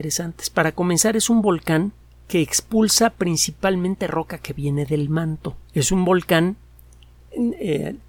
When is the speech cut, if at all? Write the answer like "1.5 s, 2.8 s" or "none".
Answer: 2.0 s, 5.7 s